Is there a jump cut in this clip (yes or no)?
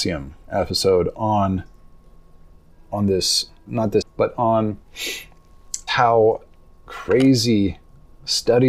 yes